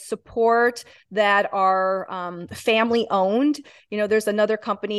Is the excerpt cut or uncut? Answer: uncut